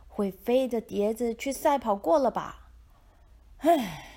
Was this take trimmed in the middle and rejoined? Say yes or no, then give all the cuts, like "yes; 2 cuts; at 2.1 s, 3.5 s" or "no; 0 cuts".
yes; 1 cut; at 2.9 s